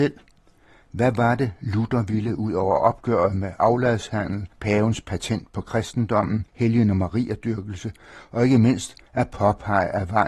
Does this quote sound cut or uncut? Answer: cut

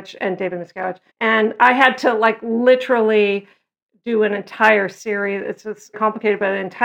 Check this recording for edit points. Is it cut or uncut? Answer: cut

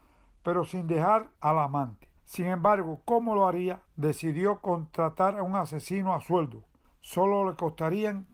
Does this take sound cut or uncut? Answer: cut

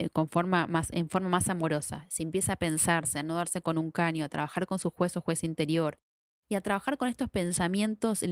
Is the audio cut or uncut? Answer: uncut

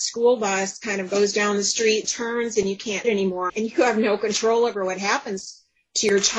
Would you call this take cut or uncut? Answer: cut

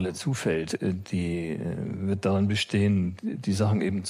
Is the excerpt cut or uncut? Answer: uncut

